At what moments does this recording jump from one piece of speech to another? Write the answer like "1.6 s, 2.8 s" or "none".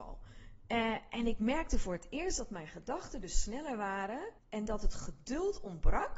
4.4 s

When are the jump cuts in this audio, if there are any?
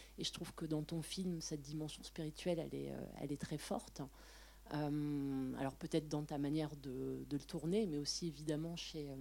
none

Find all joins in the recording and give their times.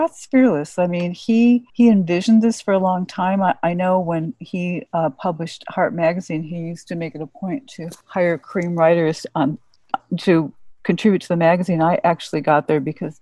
1.7 s, 4.9 s, 8.0 s

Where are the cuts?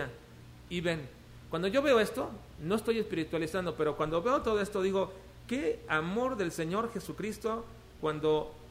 none

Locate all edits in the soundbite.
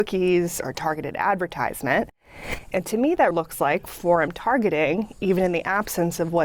3.3 s

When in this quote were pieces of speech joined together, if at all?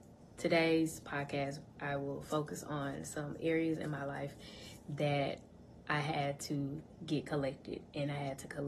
none

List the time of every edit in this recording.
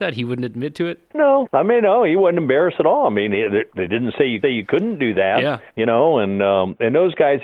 4.4 s, 5.7 s

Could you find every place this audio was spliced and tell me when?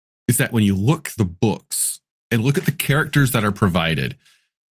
1.2 s

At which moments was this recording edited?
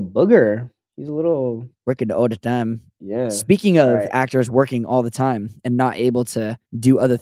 none

